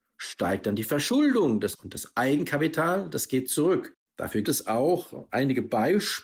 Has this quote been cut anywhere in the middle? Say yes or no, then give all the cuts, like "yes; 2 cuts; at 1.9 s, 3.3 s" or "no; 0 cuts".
yes; 2 cuts; at 1.7 s, 4.4 s